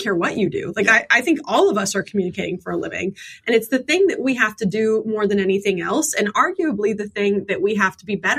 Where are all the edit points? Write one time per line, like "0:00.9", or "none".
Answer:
none